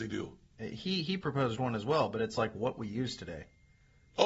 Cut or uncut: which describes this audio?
uncut